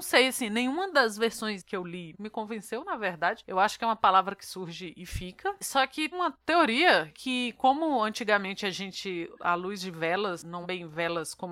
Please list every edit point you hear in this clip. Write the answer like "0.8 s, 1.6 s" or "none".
2.1 s, 6.1 s, 7.1 s, 10.6 s